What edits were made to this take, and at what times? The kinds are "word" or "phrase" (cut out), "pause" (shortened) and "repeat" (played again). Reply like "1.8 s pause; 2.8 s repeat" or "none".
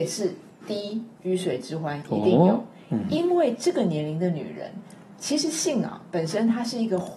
none